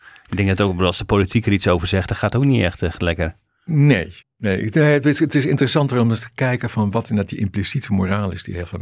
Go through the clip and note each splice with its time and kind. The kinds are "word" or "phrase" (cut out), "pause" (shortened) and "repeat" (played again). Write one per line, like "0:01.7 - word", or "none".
0:04.2 - pause